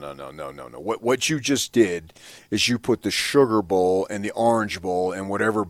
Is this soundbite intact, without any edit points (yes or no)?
yes